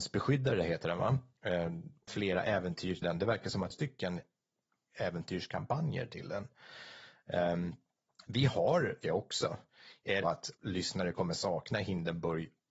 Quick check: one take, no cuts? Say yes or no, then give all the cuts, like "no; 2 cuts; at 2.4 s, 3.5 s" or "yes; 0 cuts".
no; 6 cuts; at 2.1 s, 3.0 s, 3.7 s, 9.0 s, 10.2 s, 10.6 s